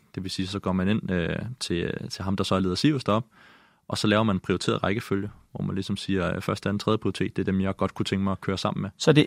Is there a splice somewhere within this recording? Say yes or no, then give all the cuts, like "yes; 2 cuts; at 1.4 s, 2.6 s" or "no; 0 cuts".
no; 0 cuts